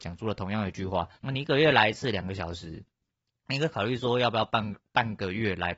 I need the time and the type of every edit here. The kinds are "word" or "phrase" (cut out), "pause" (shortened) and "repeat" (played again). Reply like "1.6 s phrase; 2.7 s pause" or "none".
1.1 s pause